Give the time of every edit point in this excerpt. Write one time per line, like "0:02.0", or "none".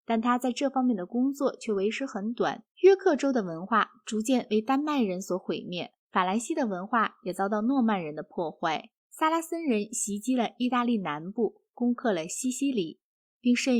0:02.7
0:06.0
0:09.0